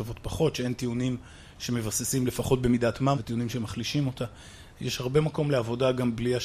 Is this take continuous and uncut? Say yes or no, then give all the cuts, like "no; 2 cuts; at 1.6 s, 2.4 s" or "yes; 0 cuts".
no; 1 cut; at 3.1 s